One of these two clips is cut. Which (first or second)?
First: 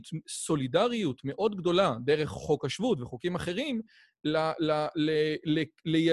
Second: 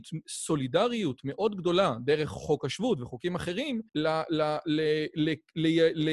second